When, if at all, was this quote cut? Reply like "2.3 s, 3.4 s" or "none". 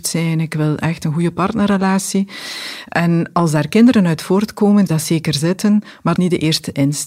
4.9 s, 6.2 s